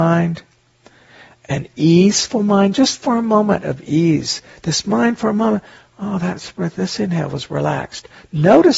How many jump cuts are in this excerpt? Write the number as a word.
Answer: zero